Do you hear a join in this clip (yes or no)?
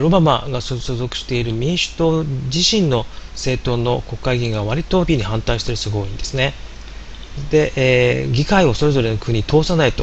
yes